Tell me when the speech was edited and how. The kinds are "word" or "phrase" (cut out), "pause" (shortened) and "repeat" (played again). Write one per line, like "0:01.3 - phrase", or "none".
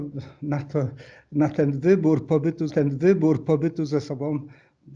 0:02.7 - repeat